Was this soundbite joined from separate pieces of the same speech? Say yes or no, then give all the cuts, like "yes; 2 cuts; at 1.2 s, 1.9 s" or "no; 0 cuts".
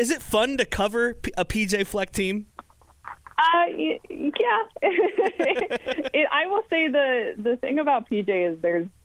yes; 1 cut; at 2.5 s